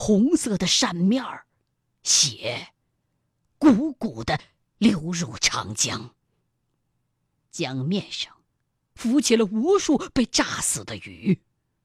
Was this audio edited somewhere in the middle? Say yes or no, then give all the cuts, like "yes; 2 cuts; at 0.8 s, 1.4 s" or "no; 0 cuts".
yes; 1 cut; at 1.6 s